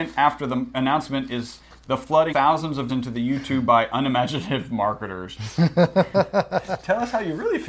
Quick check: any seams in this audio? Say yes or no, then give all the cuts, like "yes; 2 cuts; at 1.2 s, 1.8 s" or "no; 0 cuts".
yes; 2 cuts; at 2.3 s, 2.9 s